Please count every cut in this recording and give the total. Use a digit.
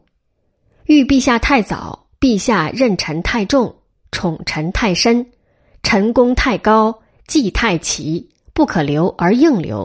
0